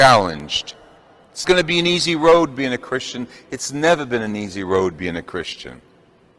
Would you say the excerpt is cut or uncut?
cut